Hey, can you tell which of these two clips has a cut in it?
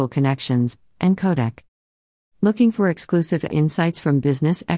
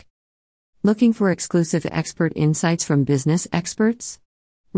first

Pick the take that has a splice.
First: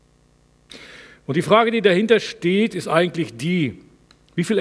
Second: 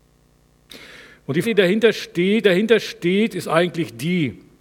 second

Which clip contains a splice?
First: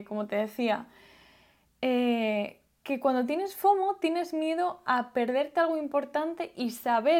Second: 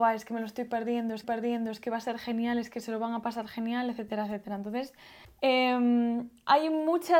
second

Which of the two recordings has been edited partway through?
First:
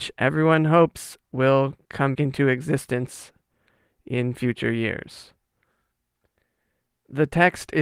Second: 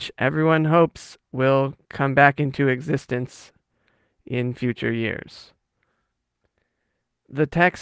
first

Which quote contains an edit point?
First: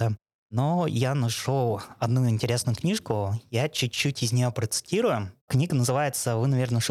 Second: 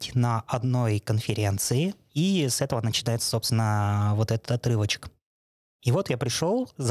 first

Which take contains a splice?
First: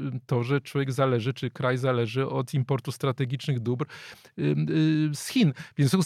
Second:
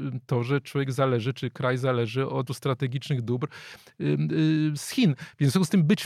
second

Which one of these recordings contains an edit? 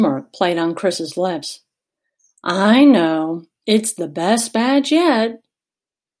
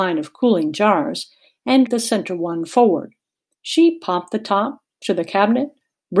second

